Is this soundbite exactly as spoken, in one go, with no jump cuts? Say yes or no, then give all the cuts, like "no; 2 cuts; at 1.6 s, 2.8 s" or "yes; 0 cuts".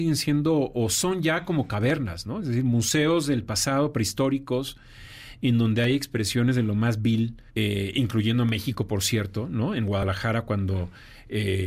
no; 1 cut; at 7.5 s